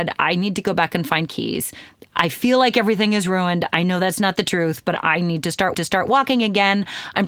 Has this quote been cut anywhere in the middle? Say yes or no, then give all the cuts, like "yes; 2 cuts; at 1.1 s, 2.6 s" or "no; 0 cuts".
yes; 1 cut; at 5.7 s